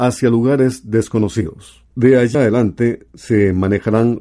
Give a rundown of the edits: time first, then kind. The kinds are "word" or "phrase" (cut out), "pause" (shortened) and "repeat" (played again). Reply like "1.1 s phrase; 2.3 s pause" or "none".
1.8 s pause; 2.3 s word